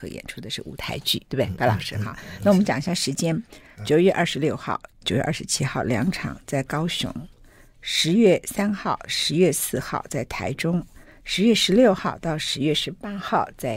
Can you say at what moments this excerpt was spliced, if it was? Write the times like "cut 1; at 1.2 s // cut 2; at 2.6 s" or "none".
none